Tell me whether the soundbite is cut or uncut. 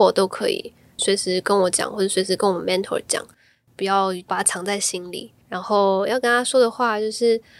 cut